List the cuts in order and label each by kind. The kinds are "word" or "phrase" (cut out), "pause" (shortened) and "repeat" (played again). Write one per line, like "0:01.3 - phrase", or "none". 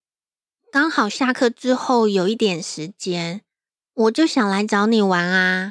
none